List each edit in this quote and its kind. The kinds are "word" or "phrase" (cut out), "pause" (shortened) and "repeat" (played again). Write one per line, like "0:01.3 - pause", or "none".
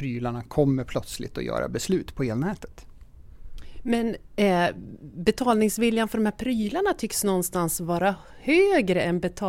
none